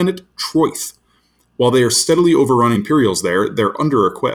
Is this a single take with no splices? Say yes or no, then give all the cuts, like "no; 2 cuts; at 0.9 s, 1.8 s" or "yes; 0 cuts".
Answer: no; 1 cut; at 2.7 s